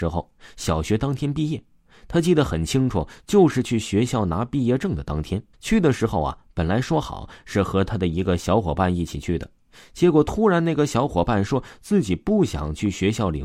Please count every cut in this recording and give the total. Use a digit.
1